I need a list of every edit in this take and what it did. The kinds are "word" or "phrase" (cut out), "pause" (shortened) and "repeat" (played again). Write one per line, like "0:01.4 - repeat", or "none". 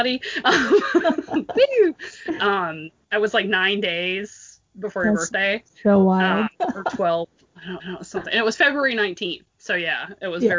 0:06.5 - pause
0:07.8 - repeat
0:09.5 - pause